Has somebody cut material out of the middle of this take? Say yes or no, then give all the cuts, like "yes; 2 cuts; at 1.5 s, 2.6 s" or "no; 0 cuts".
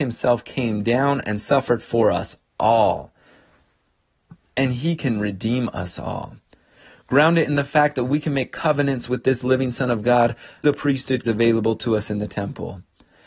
yes; 3 cuts; at 4.4 s, 10.6 s, 11.2 s